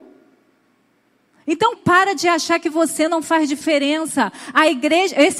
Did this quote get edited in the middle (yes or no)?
yes